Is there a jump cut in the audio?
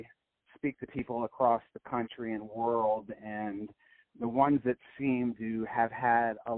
no; 0 cuts

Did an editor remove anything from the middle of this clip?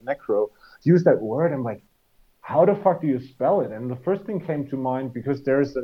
no; 0 cuts

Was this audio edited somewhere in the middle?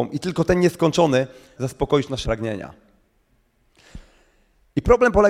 yes; 2 cuts; at 1.6 s, 2.2 s

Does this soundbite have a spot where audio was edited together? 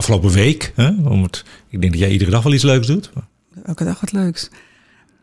no; 0 cuts

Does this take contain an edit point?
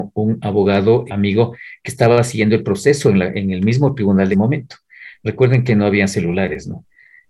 yes; 2 cuts; at 1.1 s, 4.3 s

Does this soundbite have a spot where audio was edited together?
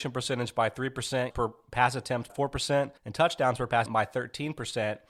yes; 4 cuts; at 1.3 s, 2.3 s, 3.0 s, 3.9 s

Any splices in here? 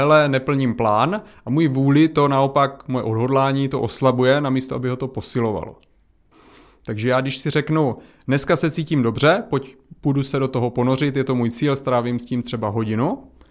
no; 0 cuts

